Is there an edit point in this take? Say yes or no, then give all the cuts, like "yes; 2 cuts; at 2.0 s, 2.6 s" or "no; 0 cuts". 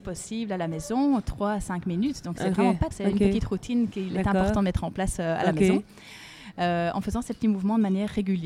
yes; 1 cut; at 2.9 s